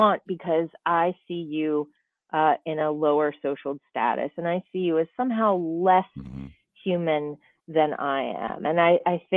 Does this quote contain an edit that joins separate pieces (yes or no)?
no